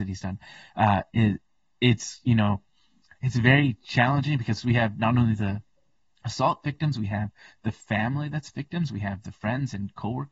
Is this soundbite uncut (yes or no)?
yes